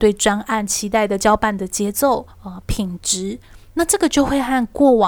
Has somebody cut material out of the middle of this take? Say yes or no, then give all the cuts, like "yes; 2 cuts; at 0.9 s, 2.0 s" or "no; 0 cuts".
yes; 1 cut; at 2.3 s